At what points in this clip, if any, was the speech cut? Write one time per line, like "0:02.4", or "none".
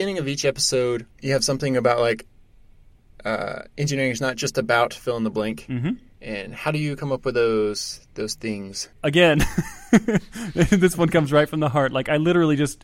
0:01.1
0:06.1
0:08.9